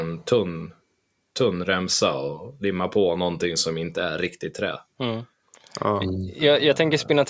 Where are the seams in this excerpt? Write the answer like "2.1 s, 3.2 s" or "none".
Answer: 4.9 s

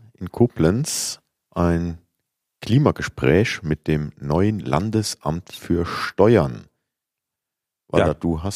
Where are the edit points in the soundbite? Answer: none

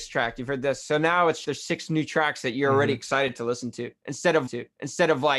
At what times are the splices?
1.4 s, 4.5 s

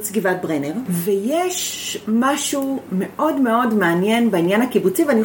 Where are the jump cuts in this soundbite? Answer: none

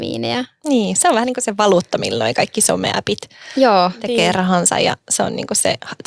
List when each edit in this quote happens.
none

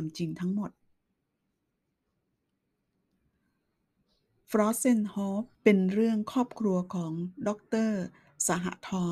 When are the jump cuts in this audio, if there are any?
5.5 s

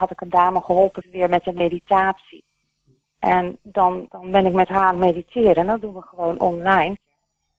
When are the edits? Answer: 1.0 s, 2.6 s, 4.1 s

